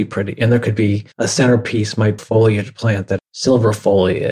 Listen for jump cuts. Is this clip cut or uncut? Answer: cut